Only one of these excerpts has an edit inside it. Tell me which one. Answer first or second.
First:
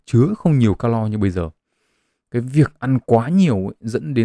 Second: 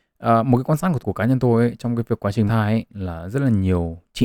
second